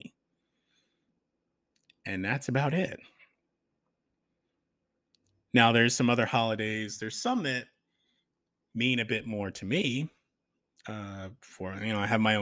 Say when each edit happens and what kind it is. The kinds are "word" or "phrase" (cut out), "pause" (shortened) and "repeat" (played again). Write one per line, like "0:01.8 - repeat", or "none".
none